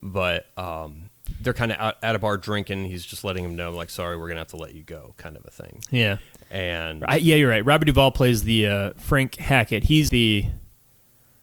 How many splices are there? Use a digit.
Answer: 1